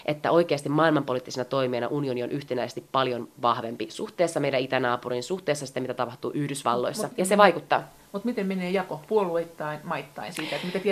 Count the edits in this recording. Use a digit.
0